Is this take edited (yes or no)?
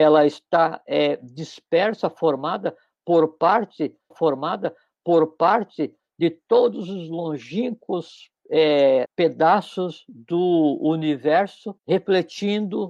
yes